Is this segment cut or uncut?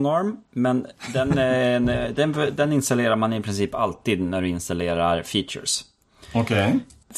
uncut